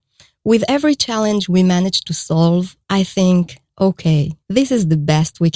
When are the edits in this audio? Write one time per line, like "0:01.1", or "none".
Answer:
0:02.8
0:04.4